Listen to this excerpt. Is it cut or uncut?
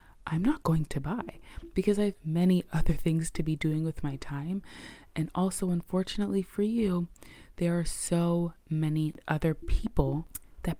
cut